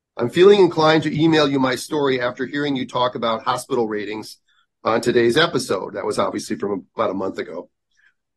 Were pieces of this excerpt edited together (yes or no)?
no